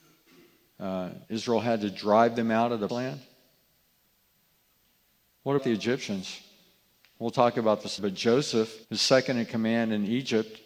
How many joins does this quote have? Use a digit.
5